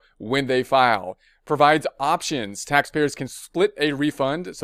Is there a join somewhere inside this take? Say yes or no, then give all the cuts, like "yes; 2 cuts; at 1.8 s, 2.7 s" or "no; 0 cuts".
no; 0 cuts